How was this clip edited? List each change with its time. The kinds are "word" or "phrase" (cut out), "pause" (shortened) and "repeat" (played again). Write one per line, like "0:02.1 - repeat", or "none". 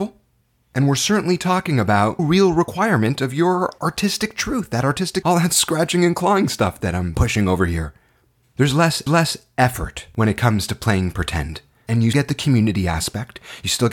0:02.2 - word
0:05.2 - word
0:09.1 - repeat
0:12.1 - word